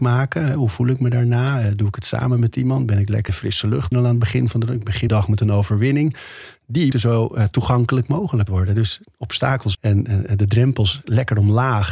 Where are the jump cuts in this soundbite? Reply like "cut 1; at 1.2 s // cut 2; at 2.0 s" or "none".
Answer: cut 1; at 3.3 s // cut 2; at 3.9 s // cut 3; at 5.1 s // cut 4; at 6.9 s // cut 5; at 8.5 s // cut 6; at 9.7 s